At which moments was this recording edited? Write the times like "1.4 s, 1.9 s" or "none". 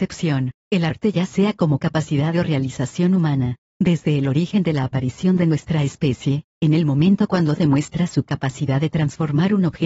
none